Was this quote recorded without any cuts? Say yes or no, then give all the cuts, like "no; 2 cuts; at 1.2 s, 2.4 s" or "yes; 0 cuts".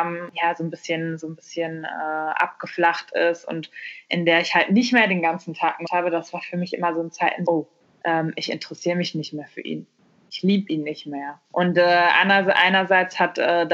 no; 4 cuts; at 5.9 s, 7.5 s, 7.8 s, 11.4 s